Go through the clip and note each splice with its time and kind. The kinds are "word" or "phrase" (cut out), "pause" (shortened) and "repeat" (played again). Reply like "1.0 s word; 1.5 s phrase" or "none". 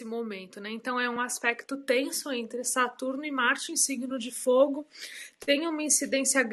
none

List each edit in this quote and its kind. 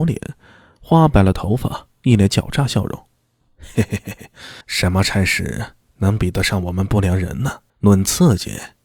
4.6 s pause; 7.7 s pause

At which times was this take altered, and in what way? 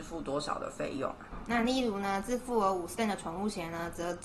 3.0 s word

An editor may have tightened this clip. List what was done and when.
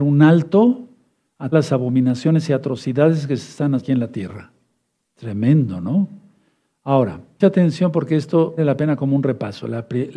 1.5 s word; 3.8 s word; 7.4 s word; 8.6 s word

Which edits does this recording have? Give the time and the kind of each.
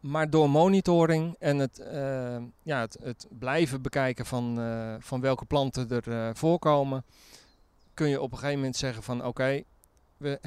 none

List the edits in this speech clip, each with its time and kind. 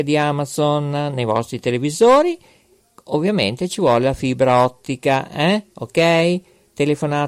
none

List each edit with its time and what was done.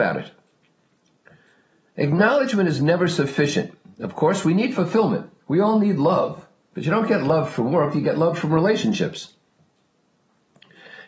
5.4 s pause; 6.6 s pause

